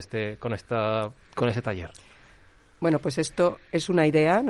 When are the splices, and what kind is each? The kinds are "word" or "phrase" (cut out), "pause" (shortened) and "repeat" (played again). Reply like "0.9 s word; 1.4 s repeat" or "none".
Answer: none